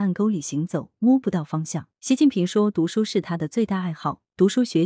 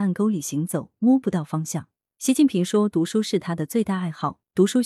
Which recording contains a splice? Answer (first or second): first